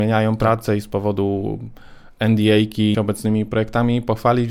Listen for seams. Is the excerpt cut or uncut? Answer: cut